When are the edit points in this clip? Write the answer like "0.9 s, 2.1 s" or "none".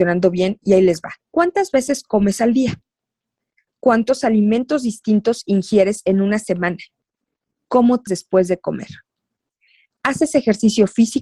1.2 s, 8.1 s